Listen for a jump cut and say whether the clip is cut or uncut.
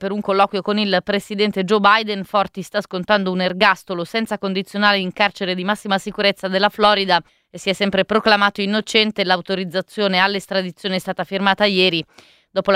cut